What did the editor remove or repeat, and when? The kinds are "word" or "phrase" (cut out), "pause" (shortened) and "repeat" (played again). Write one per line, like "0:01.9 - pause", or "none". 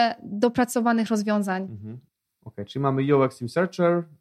0:02.2 - pause

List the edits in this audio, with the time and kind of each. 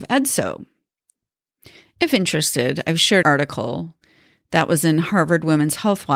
0:03.2 - word

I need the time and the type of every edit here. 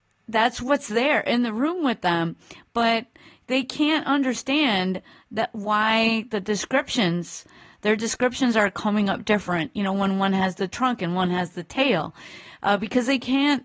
none

